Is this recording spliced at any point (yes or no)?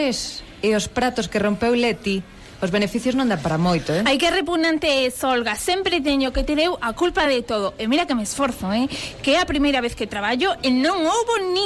no